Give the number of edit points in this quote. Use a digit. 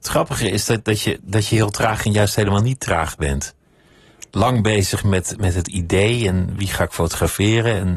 0